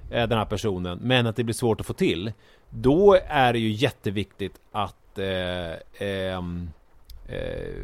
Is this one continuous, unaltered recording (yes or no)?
yes